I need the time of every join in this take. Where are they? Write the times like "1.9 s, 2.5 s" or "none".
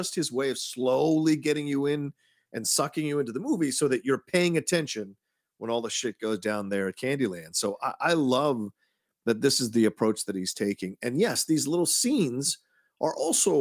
none